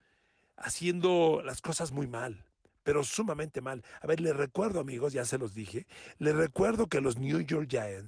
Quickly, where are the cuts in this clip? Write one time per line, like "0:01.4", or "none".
none